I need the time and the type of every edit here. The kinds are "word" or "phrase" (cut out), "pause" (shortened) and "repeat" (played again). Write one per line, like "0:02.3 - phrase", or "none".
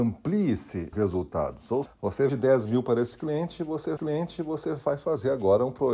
0:00.9 - word
0:01.9 - word
0:02.3 - word
0:04.0 - repeat